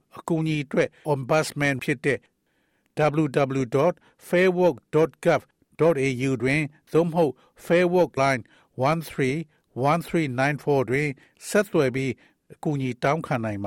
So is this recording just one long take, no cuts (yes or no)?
no